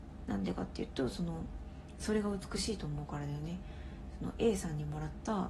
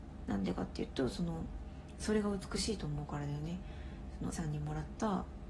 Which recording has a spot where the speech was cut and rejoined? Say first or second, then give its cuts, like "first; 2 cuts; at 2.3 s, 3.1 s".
second; 1 cut; at 4.3 s